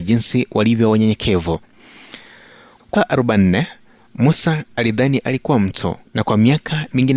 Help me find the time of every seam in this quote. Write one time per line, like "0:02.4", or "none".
0:02.9
0:06.1